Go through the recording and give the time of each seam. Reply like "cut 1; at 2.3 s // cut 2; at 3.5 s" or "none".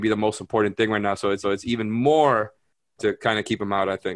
cut 1; at 1.4 s // cut 2; at 3.0 s